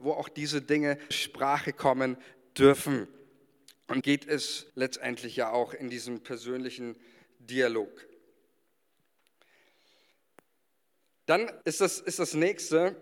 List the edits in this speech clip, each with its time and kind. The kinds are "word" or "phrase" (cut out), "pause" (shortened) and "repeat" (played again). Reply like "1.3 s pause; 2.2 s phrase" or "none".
1.1 s word; 4.0 s word; 4.7 s pause; 11.6 s pause